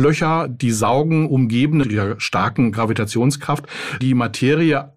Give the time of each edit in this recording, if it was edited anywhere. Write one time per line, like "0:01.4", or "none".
0:01.8
0:04.0